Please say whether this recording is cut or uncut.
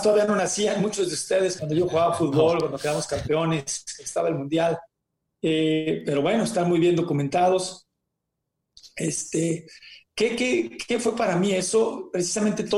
cut